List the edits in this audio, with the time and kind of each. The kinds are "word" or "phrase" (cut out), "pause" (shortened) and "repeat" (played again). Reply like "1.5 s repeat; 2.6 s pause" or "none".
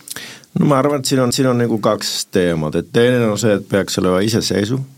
1.3 s repeat